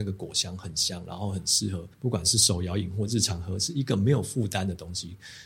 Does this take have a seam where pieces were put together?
yes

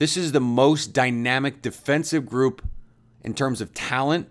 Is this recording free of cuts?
yes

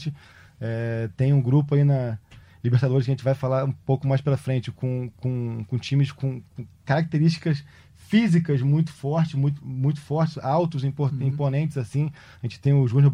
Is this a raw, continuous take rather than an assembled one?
yes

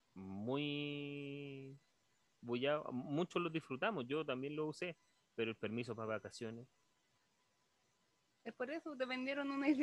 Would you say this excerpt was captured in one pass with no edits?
yes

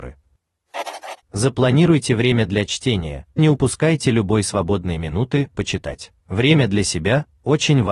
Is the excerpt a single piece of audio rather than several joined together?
no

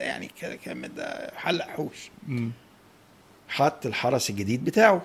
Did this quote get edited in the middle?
no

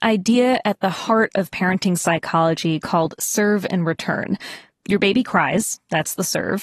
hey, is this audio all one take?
yes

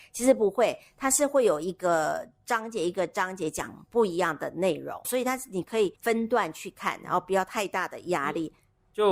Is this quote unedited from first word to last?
no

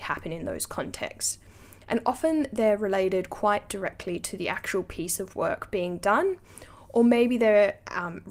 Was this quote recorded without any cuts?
yes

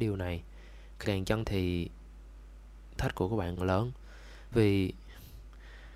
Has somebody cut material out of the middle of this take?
yes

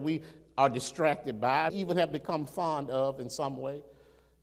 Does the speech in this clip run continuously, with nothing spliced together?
no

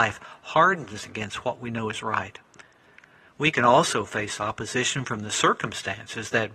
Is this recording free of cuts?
yes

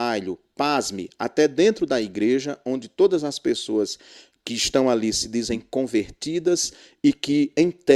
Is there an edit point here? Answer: no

